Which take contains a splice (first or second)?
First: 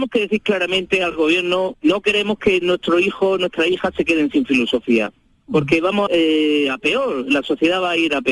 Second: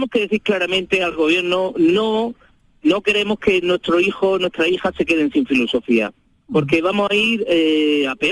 first